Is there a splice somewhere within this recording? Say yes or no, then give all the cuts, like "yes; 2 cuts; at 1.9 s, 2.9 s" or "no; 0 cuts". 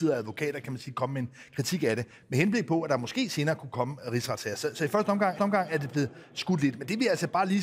yes; 1 cut; at 5.4 s